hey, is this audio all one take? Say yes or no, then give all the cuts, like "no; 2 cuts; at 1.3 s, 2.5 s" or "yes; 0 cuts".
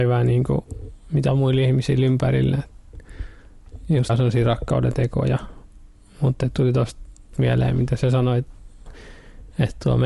no; 4 cuts; at 1.3 s, 4.1 s, 6.5 s, 7.3 s